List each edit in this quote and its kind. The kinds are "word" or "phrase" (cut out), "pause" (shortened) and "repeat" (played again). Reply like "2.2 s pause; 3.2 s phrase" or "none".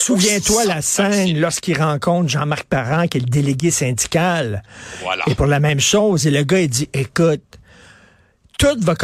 none